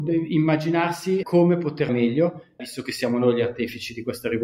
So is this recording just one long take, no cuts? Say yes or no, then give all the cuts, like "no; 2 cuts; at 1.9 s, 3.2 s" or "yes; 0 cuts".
no; 3 cuts; at 1.2 s, 1.9 s, 2.6 s